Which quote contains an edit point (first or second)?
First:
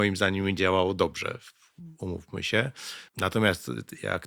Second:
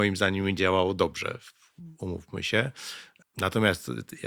first